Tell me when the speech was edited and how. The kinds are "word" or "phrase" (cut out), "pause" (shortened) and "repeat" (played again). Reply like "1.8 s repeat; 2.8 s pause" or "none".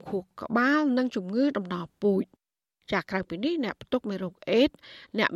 none